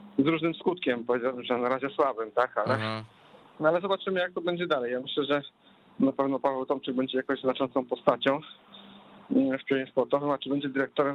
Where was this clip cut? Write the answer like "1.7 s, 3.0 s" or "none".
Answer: none